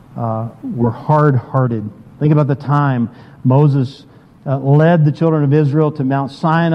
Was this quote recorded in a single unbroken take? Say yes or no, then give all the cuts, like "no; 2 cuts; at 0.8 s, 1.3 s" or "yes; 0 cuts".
yes; 0 cuts